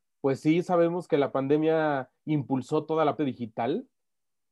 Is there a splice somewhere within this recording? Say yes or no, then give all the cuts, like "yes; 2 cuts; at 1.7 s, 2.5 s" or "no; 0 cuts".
yes; 1 cut; at 3.2 s